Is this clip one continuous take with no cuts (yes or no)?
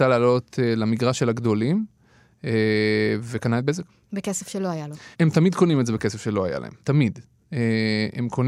no